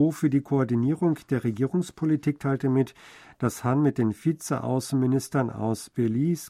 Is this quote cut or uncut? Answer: uncut